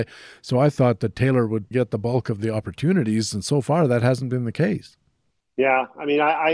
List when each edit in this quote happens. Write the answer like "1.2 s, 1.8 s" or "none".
1.7 s